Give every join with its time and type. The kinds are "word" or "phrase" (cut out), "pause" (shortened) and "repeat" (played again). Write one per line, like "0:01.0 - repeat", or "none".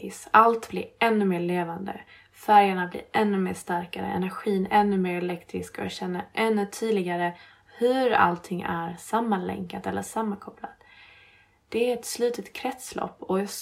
none